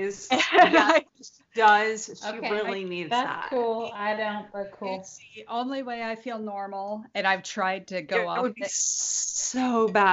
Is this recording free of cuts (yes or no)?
yes